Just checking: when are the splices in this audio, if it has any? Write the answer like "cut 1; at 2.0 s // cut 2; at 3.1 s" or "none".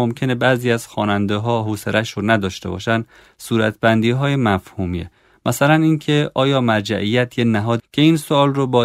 cut 1; at 7.8 s